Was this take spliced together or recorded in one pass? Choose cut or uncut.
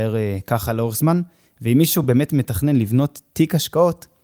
uncut